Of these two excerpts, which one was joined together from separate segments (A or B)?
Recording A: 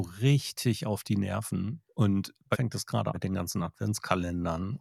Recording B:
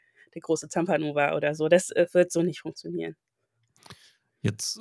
A